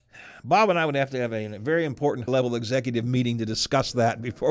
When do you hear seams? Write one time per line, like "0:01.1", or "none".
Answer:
0:02.3

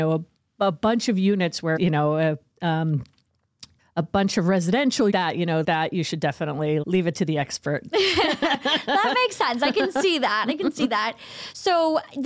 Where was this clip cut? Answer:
0:01.8
0:03.8
0:05.1
0:05.6
0:06.8

